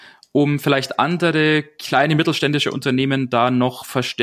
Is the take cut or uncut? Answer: uncut